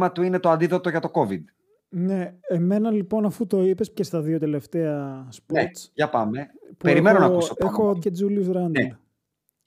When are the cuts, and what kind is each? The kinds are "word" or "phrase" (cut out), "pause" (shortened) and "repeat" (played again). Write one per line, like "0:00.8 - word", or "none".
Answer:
0:02.4 - pause
0:03.9 - word
0:08.0 - word